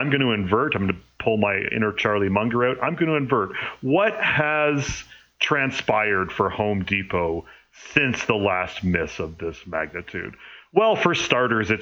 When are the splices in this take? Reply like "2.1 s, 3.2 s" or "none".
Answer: none